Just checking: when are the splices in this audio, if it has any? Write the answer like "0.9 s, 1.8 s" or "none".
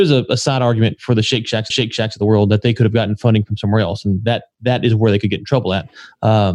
1.7 s